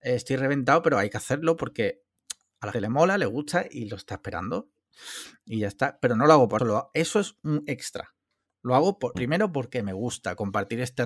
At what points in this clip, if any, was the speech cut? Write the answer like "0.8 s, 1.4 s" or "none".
2.7 s, 6.6 s, 9.1 s